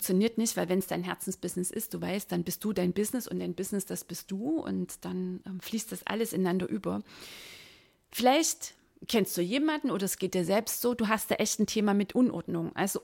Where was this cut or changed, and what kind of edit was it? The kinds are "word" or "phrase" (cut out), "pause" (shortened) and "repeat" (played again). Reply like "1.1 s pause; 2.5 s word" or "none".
none

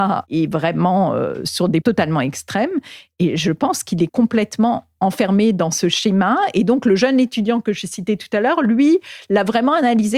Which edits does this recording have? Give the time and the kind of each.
1.8 s word; 4.1 s phrase

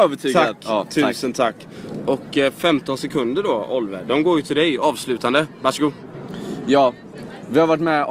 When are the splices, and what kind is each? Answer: none

